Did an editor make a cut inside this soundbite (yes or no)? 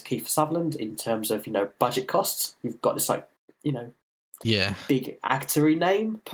no